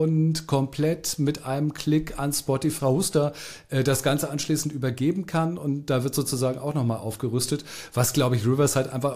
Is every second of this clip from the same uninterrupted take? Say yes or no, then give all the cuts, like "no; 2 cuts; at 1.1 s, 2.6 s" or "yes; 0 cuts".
no; 1 cut; at 2.8 s